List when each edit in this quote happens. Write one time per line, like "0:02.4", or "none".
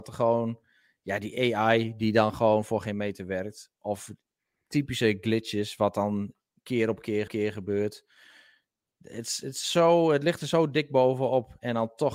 0:07.3